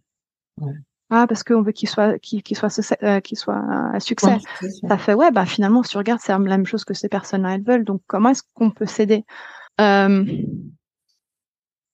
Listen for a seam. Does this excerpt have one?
yes; 1 cut; at 9.7 s

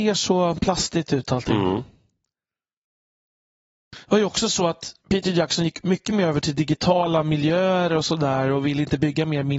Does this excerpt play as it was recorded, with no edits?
yes; 0 cuts

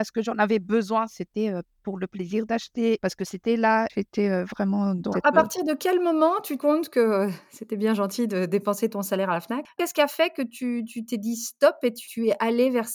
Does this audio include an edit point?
yes; 2 cuts; at 5.1 s, 6.6 s

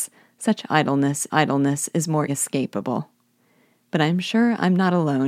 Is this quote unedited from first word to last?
no; 2 cuts; at 1.3 s, 2.3 s

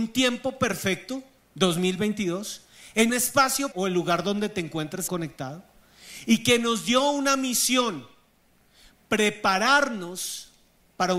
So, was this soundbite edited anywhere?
yes; 3 cuts; at 3.1 s, 3.7 s, 5.1 s

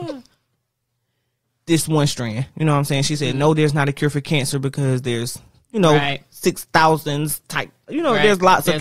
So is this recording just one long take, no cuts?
yes; 0 cuts

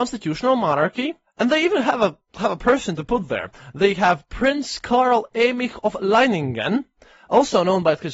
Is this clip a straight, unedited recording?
yes; 0 cuts

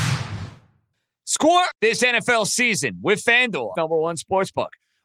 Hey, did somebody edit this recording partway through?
yes; 2 cuts; at 1.7 s, 3.7 s

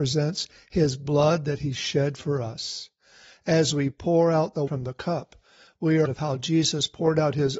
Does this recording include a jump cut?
yes; 2 cuts; at 4.7 s, 6.1 s

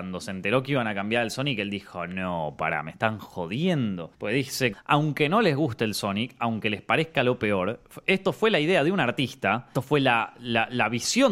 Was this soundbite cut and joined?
yes; 3 cuts; at 4.1 s, 4.7 s, 9.7 s

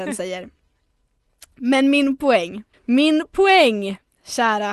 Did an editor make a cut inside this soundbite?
yes; 1 cut; at 2.7 s

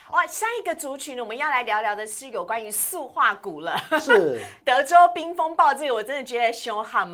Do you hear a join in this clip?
yes; 1 cut; at 4.6 s

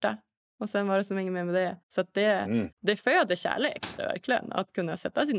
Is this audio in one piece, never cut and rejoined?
no; 3 cuts; at 1.8 s, 2.7 s, 4.0 s

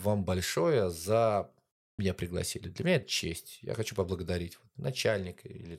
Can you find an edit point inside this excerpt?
yes; 2 cuts; at 2.0 s, 3.0 s

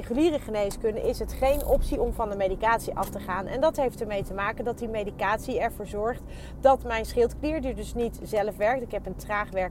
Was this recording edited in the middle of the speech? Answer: no; 0 cuts

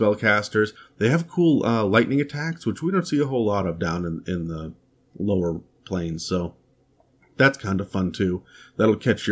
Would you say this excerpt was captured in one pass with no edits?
yes; 0 cuts

